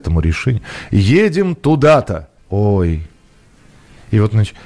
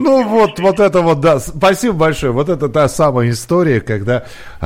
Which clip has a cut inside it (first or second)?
first